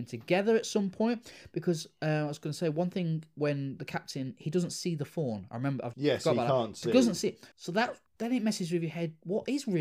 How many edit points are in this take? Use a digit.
3